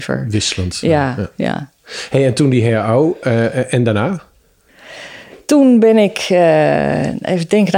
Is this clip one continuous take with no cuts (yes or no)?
yes